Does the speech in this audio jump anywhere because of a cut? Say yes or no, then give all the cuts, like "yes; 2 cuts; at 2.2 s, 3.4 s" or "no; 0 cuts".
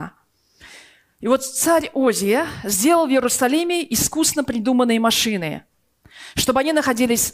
no; 0 cuts